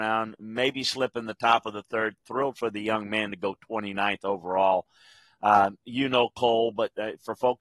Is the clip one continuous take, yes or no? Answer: yes